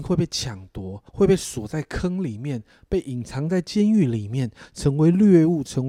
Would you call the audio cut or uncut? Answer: cut